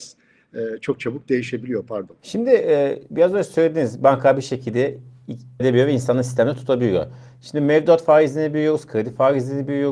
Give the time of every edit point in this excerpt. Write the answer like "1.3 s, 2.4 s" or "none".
5.6 s